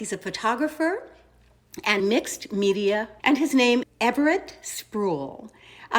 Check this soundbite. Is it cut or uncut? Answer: cut